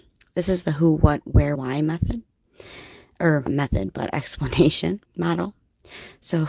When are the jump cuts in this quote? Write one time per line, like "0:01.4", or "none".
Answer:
0:01.5
0:03.5
0:05.0